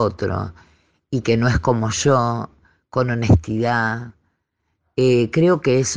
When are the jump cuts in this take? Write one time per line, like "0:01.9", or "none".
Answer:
none